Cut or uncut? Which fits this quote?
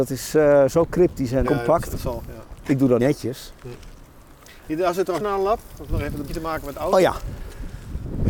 cut